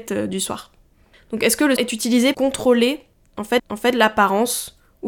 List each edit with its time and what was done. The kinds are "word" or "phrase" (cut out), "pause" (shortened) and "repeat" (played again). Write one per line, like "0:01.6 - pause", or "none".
0:01.8 - word
0:02.3 - word
0:03.6 - repeat